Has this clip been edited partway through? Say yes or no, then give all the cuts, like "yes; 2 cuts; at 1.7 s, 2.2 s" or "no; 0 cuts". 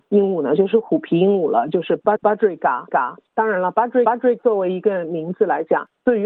yes; 4 cuts; at 2.2 s, 2.9 s, 4.1 s, 4.4 s